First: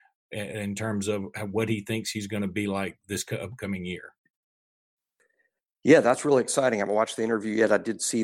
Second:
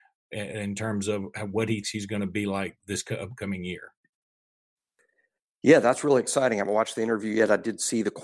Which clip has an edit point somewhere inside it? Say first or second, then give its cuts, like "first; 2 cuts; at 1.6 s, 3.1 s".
second; 1 cut; at 1.8 s